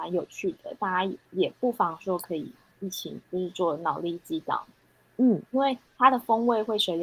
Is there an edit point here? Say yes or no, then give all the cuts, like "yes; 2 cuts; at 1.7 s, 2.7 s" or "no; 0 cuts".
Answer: yes; 3 cuts; at 1.2 s, 3.2 s, 5.5 s